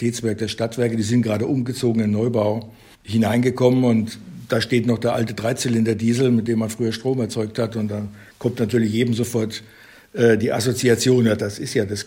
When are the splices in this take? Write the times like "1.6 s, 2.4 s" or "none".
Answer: none